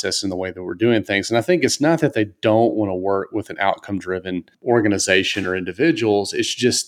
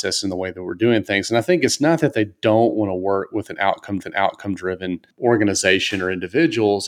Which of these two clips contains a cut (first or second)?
second